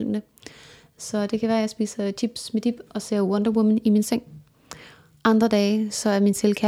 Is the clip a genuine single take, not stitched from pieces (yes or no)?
yes